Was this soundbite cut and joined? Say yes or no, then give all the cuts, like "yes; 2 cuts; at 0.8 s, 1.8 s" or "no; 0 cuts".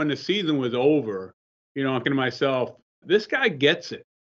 yes; 2 cuts; at 2.0 s, 3.0 s